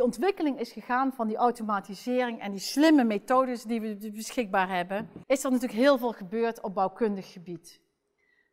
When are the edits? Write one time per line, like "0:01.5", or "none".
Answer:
0:05.2